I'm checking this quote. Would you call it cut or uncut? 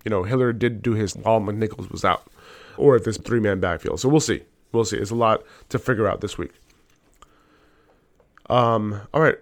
cut